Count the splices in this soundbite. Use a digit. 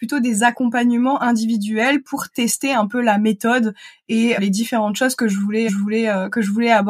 2